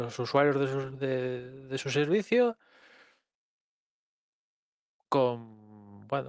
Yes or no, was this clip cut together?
no